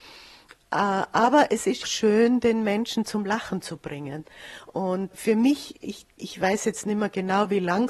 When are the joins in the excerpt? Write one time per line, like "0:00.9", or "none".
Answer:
0:01.8
0:05.1
0:06.2